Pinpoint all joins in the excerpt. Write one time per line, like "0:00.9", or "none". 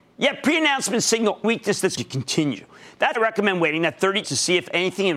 0:01.4
0:02.0
0:03.1
0:04.2